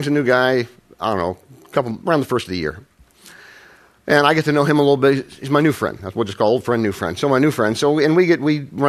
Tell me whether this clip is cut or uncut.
uncut